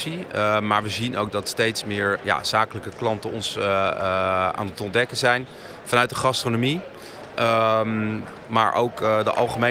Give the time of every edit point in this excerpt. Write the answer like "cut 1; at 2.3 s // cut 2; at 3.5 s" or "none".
cut 1; at 2.2 s